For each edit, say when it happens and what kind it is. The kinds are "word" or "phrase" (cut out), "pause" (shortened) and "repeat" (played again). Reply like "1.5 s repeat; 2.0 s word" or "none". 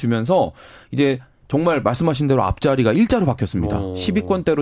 none